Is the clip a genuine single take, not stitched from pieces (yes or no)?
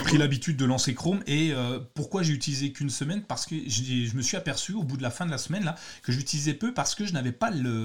yes